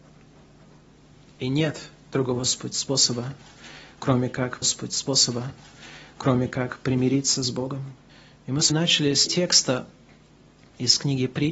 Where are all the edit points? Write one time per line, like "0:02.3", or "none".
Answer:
0:04.6
0:08.1
0:08.7
0:09.3